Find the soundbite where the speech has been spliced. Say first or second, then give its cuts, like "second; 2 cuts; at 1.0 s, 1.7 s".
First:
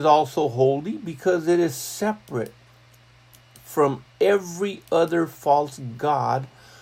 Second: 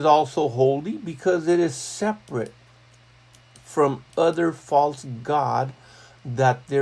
second; 1 cut; at 4.1 s